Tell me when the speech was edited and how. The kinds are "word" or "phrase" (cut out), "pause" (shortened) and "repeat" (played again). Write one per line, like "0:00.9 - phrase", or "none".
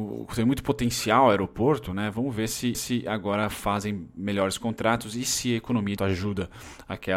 0:02.7 - repeat
0:06.0 - phrase